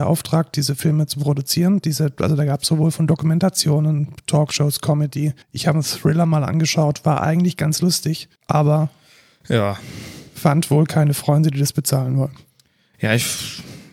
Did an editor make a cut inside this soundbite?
yes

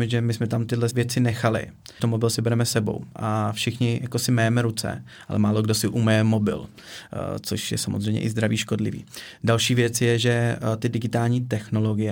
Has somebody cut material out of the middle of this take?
yes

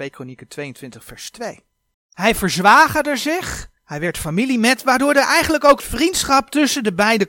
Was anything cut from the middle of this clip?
yes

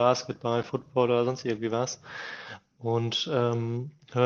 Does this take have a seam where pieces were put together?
no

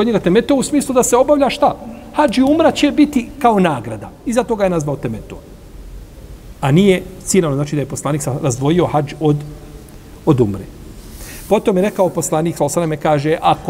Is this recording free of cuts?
yes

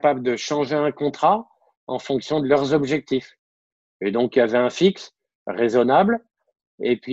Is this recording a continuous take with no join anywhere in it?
yes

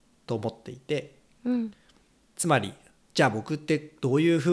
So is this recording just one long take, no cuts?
yes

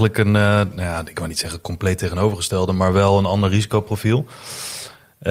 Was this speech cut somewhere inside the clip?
no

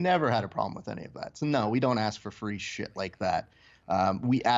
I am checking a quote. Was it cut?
no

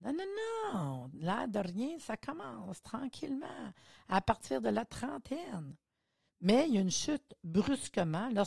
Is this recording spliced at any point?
no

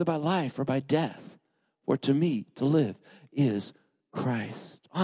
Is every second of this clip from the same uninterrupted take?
yes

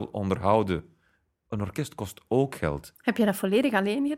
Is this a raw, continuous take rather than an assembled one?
yes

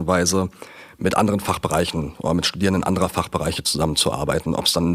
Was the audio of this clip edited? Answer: no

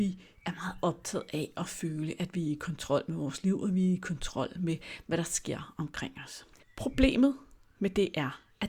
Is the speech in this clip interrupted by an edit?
no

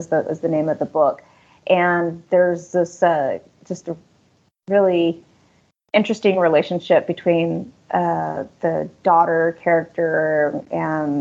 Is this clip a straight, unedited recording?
yes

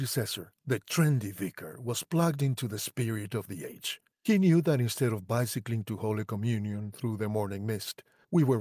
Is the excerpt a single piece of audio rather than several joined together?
no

